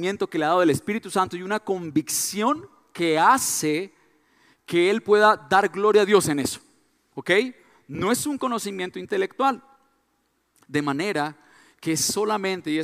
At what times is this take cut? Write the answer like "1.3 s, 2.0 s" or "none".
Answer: none